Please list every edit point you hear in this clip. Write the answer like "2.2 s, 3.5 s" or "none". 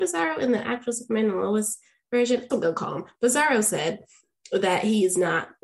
2.5 s

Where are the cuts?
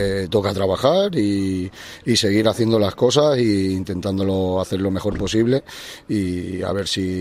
none

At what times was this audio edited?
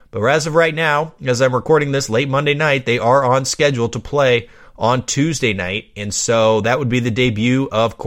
none

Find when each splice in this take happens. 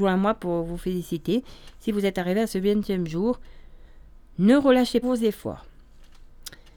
5.0 s

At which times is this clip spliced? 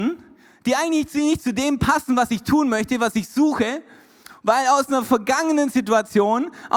4.4 s

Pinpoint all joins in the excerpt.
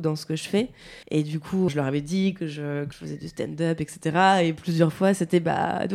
1.0 s, 1.7 s, 2.9 s

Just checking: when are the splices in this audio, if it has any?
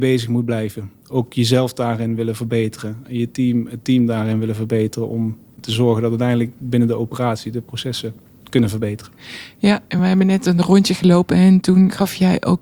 none

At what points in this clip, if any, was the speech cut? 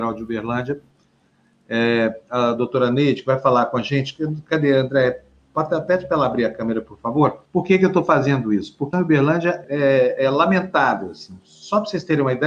7.5 s, 8.9 s, 9.6 s

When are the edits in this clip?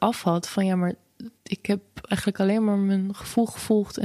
1.4 s

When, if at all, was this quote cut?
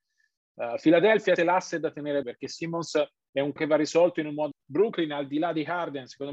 1.4 s, 2.2 s, 3.6 s, 4.5 s

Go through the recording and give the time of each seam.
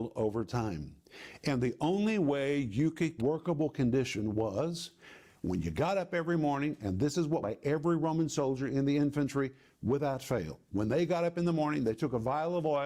3.2 s, 7.4 s

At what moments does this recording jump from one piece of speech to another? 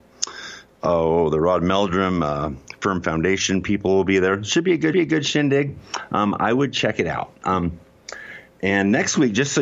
4.9 s

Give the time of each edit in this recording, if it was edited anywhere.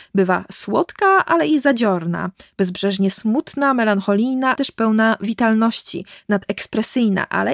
4.6 s

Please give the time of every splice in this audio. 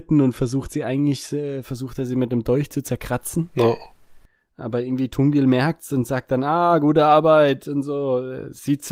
none

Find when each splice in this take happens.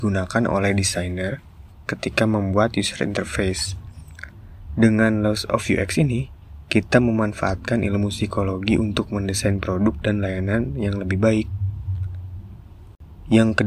none

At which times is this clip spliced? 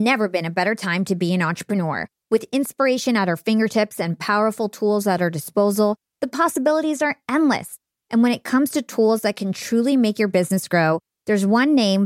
none

